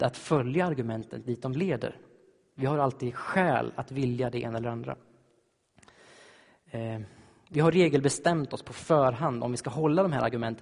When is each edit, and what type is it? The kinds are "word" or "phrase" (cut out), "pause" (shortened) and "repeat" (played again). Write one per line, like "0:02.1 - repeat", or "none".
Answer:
none